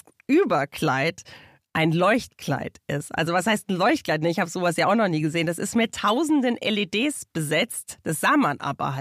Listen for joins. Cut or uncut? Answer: uncut